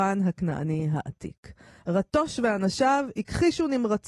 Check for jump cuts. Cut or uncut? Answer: uncut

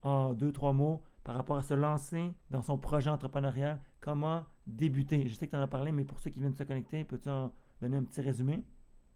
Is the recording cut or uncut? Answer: cut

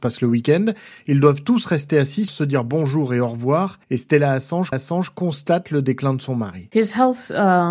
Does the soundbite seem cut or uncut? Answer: cut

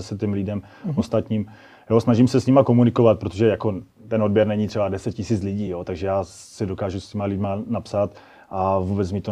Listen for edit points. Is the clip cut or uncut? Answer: uncut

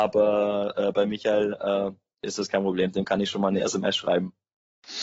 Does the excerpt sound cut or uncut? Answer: uncut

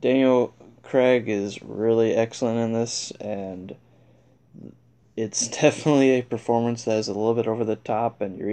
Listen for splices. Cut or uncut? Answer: uncut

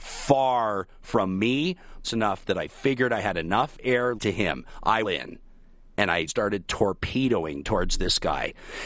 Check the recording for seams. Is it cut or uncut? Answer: cut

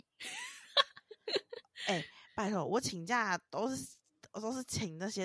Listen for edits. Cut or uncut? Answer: uncut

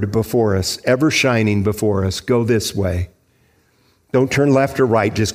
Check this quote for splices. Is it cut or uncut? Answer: uncut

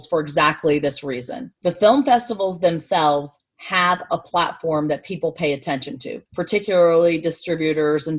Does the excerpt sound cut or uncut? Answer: cut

